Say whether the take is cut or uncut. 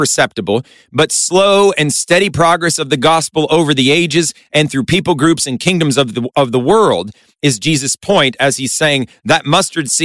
uncut